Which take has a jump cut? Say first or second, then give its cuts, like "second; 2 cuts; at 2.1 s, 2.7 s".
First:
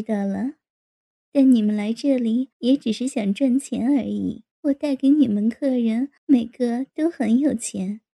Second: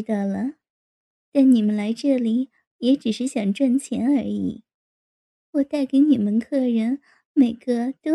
first; 3 cuts; at 2.5 s, 4.5 s, 6.2 s